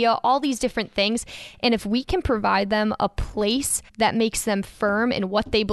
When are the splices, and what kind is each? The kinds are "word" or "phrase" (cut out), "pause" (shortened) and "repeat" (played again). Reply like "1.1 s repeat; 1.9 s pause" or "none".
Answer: 3.9 s pause